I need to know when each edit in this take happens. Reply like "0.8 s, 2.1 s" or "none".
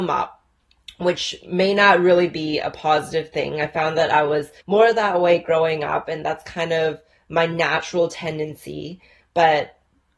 4.6 s